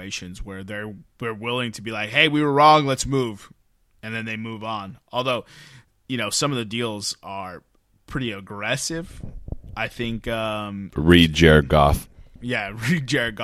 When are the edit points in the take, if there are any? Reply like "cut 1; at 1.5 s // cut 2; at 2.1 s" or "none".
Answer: none